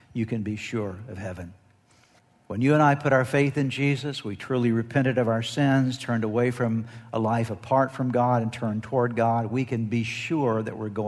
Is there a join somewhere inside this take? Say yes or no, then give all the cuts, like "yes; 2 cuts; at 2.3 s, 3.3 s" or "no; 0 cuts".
yes; 1 cut; at 2.2 s